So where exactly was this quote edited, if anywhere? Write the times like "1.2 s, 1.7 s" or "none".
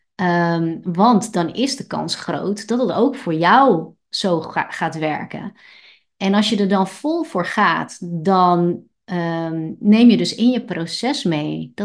none